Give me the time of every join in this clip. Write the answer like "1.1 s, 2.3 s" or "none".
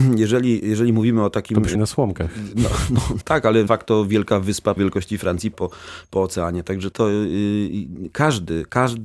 1.7 s, 3.2 s, 3.7 s, 4.8 s, 5.5 s, 6.9 s